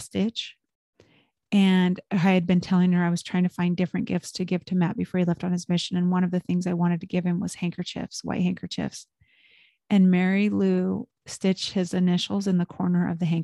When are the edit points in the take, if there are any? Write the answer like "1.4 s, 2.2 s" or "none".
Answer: none